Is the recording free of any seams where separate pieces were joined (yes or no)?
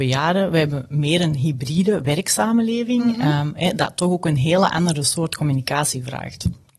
yes